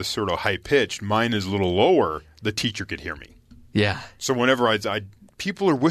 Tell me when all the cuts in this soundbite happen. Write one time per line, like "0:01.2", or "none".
none